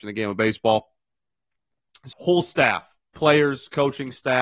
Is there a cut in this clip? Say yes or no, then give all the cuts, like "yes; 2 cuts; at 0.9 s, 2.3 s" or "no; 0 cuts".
yes; 1 cut; at 2.1 s